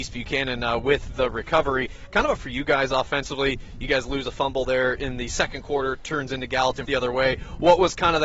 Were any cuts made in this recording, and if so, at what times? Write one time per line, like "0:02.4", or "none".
0:02.4
0:06.8